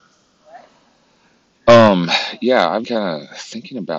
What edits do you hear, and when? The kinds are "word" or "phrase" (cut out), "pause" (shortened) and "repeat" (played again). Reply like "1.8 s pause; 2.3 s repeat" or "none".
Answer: 2.8 s word